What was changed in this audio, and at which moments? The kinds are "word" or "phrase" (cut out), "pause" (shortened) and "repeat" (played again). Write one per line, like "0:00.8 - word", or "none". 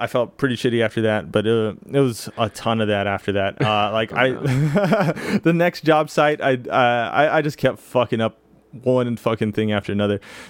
none

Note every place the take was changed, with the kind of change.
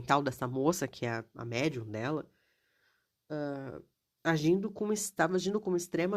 none

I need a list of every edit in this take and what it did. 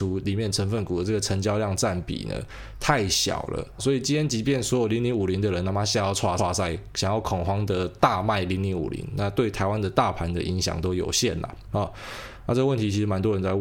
0:03.8 - phrase
0:06.4 - repeat

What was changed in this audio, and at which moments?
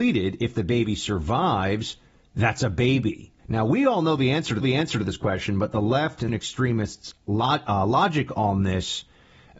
0:03.4 - pause
0:04.6 - repeat
0:06.3 - phrase

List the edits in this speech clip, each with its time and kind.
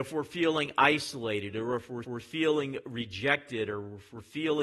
0:02.0 - repeat

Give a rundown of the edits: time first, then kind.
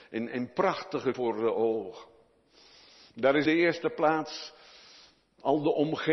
0:01.1 - word
0:03.5 - word

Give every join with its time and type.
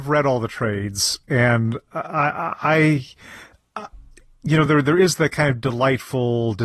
none

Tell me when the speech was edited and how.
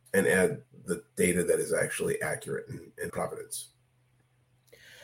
0:03.1 - phrase

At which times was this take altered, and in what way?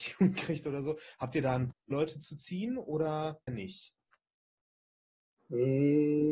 0:01.7 - word
0:03.5 - word

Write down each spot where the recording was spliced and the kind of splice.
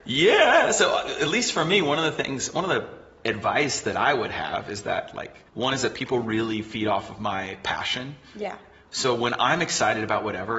0:05.5 - pause

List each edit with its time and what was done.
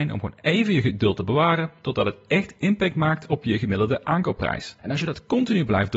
0:04.8 - pause

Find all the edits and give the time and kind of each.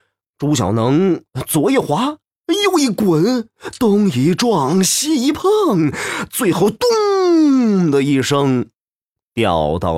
none

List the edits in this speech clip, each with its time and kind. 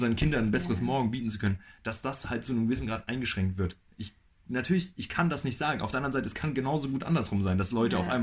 none

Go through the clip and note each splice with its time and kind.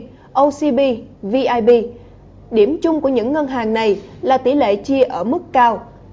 none

